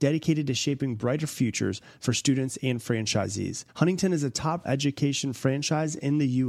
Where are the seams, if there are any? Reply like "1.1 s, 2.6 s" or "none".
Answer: 3.7 s, 4.6 s